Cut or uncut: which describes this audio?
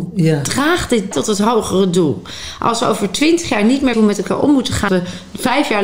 cut